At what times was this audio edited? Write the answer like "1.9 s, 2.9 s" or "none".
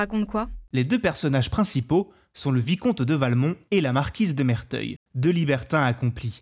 none